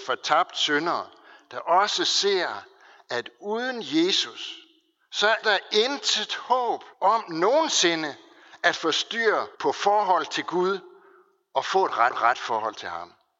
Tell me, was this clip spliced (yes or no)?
yes